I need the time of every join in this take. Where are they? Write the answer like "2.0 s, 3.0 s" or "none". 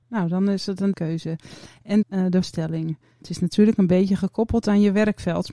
0.9 s, 2.0 s, 2.4 s